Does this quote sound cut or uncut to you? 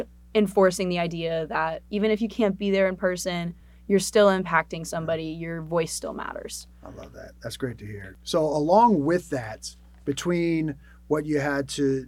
uncut